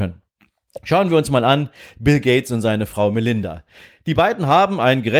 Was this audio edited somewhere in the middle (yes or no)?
no